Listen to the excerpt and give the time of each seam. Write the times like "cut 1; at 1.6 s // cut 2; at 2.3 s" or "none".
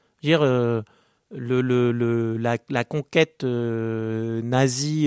none